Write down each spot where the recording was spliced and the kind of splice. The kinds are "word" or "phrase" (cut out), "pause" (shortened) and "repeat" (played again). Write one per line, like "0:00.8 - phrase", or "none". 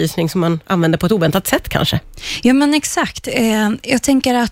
none

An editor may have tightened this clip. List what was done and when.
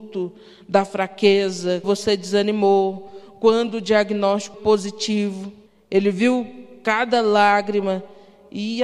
0:01.8 - word
0:04.5 - word
0:05.7 - pause

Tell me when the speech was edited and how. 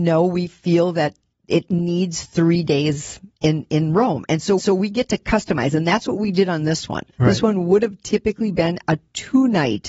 0:03.4 - pause
0:04.6 - repeat
0:07.1 - pause

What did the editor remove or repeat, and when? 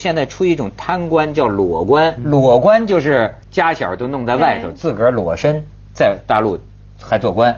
0:02.2 - word
0:03.4 - pause

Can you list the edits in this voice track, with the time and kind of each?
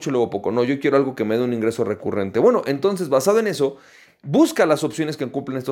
none

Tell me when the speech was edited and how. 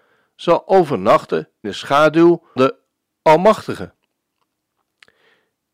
0:01.6 - word
0:02.6 - word

